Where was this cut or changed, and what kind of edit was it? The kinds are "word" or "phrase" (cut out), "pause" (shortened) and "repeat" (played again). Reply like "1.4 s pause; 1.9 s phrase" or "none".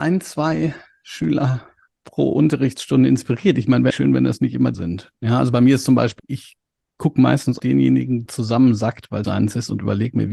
3.9 s word; 4.7 s word; 6.2 s phrase; 7.6 s word; 8.3 s word; 9.2 s phrase